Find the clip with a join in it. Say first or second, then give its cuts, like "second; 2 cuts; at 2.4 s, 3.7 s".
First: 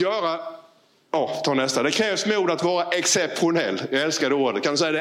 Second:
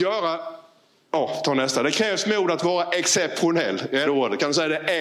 second; 1 cut; at 4.0 s